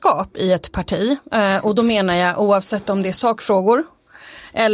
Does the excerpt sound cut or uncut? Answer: uncut